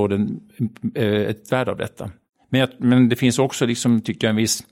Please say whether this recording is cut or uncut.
cut